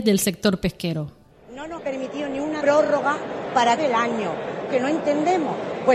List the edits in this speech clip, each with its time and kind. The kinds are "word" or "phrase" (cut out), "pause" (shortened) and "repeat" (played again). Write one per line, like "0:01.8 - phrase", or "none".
0:01.8 - word
0:02.6 - word
0:03.8 - word
0:04.7 - word